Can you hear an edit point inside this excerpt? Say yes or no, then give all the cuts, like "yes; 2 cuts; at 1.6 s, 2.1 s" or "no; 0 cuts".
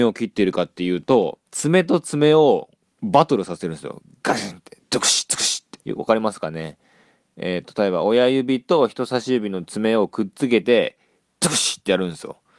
yes; 2 cuts; at 1.5 s, 5.8 s